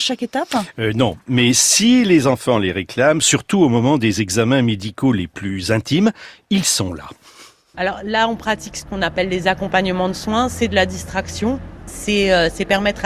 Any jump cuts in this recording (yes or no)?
no